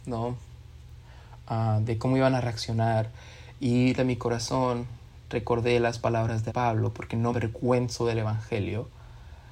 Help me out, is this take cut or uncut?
cut